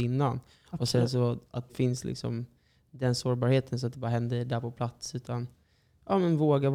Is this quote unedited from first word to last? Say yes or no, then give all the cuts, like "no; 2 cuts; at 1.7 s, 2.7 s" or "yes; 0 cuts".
no; 2 cuts; at 1.7 s, 3.9 s